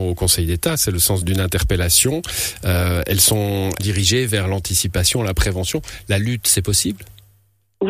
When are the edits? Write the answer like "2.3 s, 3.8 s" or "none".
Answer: 1.2 s, 3.8 s